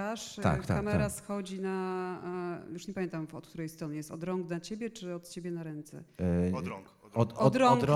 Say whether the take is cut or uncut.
uncut